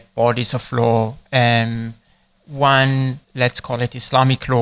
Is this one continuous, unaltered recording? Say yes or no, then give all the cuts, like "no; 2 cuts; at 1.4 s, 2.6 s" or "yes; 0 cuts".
no; 2 cuts; at 1.3 s, 3.2 s